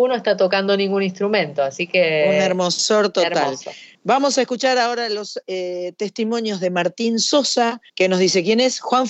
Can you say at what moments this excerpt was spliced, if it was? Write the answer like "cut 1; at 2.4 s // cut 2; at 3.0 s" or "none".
cut 1; at 3.9 s // cut 2; at 7.9 s